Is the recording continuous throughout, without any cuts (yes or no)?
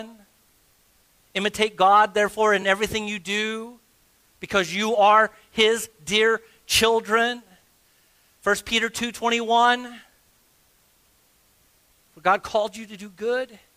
yes